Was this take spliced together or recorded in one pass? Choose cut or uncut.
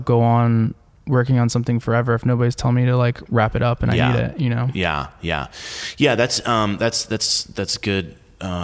uncut